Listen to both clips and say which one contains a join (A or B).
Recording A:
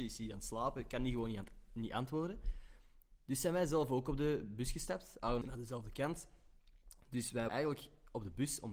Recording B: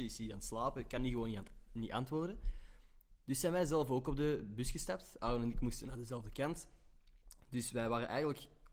A